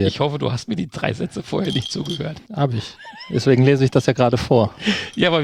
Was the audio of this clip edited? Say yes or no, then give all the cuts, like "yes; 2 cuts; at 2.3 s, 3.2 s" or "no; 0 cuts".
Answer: no; 0 cuts